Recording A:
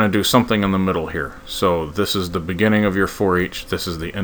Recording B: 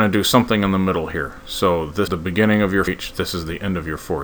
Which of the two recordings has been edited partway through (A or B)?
B